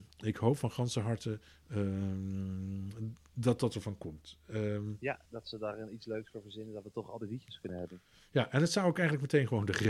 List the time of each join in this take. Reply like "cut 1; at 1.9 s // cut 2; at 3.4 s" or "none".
cut 1; at 3.2 s // cut 2; at 5.3 s

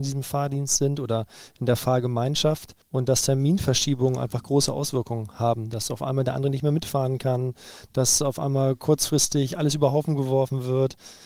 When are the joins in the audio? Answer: cut 1; at 2.8 s

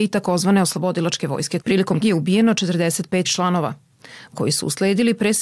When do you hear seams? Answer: cut 1; at 1.6 s // cut 2; at 2.0 s // cut 3; at 3.2 s // cut 4; at 4.3 s

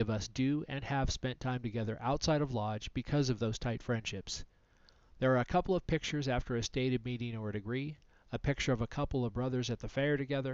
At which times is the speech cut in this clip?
none

